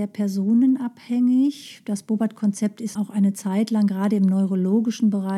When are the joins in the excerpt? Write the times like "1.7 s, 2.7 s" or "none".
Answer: 3.0 s